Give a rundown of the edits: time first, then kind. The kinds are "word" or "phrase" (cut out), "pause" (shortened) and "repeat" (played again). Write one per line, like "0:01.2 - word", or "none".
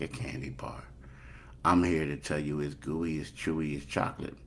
none